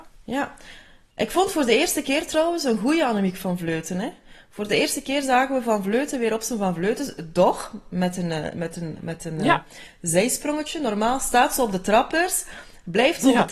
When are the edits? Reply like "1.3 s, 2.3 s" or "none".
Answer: none